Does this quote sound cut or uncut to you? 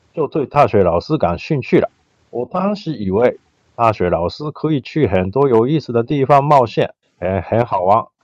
uncut